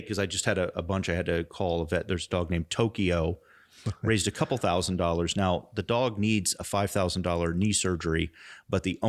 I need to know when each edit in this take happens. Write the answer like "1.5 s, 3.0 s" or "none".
none